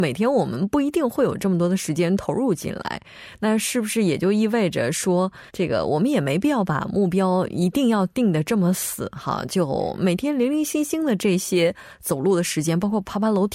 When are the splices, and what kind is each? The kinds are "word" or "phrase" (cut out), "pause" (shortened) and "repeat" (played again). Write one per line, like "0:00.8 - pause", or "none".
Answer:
0:05.5 - pause